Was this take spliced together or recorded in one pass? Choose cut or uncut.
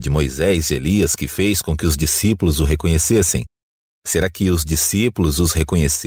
uncut